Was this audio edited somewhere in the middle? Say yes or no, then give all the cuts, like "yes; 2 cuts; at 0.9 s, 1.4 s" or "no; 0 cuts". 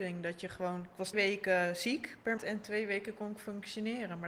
yes; 2 cuts; at 1.1 s, 2.4 s